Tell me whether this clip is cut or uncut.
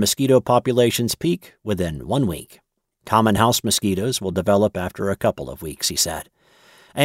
uncut